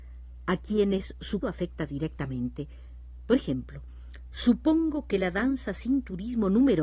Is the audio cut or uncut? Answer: cut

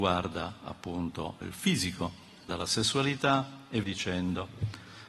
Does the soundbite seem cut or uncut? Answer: cut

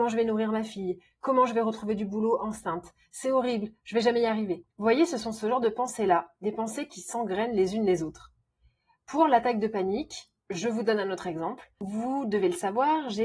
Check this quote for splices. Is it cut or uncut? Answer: cut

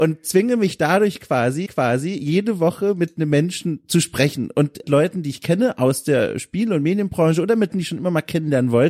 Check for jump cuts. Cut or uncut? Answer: cut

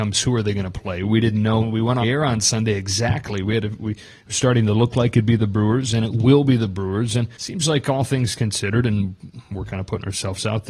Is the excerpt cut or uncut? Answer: cut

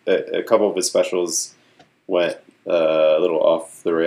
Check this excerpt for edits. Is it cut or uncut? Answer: uncut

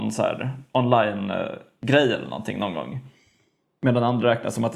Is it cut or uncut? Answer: uncut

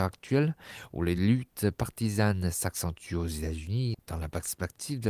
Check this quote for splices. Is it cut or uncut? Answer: uncut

